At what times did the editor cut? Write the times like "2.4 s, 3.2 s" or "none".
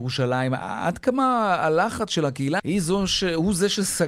2.6 s